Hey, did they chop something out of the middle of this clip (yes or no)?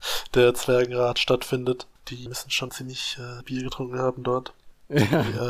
yes